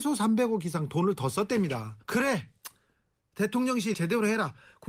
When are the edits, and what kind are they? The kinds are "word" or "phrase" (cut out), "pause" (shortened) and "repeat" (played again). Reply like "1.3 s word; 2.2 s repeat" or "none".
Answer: 2.0 s pause; 3.9 s word